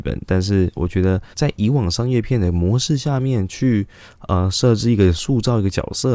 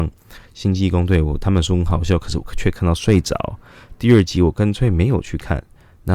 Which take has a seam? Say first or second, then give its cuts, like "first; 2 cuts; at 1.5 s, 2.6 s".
first; 1 cut; at 1.3 s